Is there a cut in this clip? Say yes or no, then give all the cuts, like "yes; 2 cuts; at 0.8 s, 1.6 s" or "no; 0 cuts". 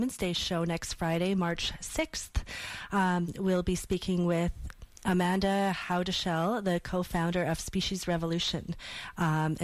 no; 0 cuts